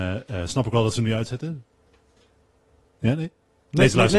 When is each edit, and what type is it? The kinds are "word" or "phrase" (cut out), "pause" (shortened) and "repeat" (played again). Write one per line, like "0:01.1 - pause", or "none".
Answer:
none